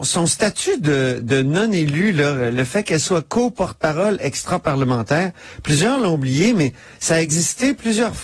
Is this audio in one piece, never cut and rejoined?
yes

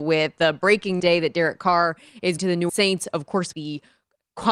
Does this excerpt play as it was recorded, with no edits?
no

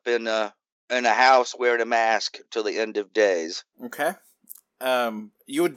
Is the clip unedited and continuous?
no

